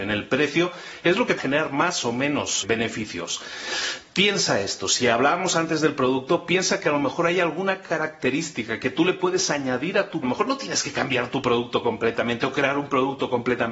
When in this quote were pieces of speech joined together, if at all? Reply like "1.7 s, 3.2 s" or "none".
1.4 s, 2.6 s, 10.2 s